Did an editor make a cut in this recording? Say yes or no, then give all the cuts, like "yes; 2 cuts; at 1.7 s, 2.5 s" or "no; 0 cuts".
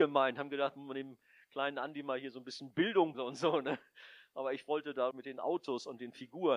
yes; 2 cuts; at 3.1 s, 5.1 s